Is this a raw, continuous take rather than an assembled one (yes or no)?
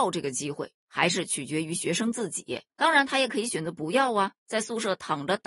no